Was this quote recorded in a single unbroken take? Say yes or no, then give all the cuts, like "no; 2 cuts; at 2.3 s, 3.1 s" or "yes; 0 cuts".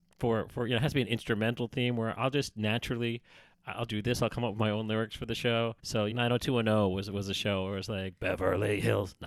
no; 3 cuts; at 3.9 s, 5.8 s, 6.1 s